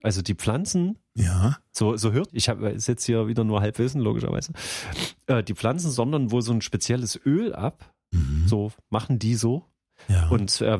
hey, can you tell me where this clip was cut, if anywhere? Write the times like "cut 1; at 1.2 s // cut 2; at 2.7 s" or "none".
cut 1; at 2.3 s